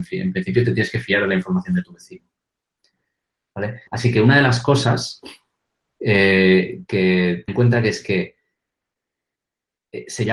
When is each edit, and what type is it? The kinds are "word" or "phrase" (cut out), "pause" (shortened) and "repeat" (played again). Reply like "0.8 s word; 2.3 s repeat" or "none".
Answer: 3.9 s pause; 7.5 s phrase